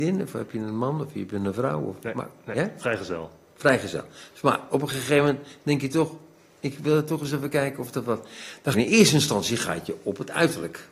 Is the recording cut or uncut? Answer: cut